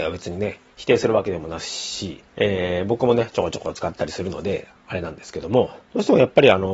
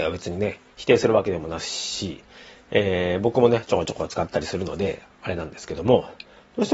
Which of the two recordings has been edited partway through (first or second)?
first